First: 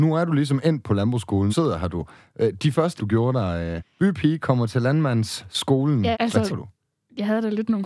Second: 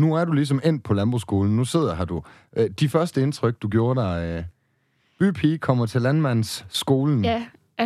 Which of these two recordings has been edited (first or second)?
first